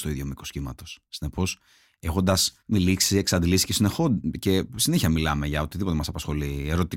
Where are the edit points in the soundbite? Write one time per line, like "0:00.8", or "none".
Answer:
0:02.6